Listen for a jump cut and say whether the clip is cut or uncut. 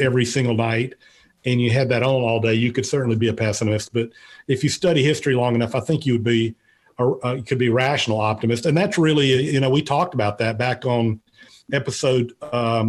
uncut